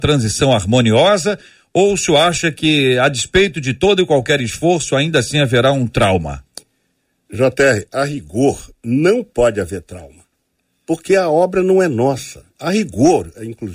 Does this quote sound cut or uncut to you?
uncut